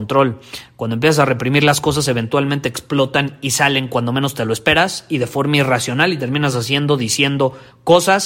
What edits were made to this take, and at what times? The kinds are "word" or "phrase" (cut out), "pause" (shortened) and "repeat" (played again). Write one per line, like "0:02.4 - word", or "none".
none